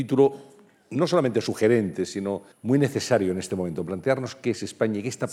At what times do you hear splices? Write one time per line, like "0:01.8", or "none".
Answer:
0:02.5